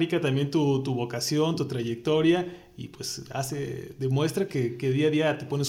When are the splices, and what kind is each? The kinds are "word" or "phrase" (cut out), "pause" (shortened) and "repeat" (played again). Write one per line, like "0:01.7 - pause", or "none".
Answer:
none